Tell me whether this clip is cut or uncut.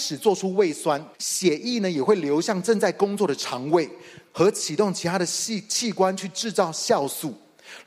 cut